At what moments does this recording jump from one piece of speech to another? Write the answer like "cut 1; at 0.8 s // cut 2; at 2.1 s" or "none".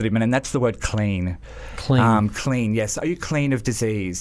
none